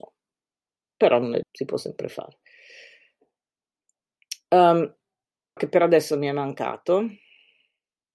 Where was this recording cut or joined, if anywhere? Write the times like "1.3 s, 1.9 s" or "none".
1.4 s, 5.6 s